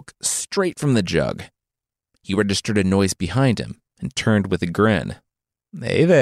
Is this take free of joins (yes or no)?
yes